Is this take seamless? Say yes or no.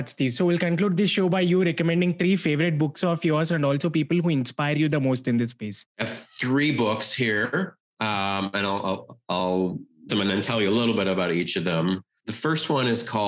no